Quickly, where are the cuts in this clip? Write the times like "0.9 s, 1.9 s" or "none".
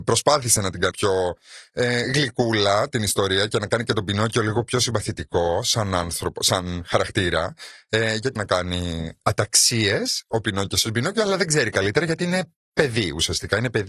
0.9 s, 8.4 s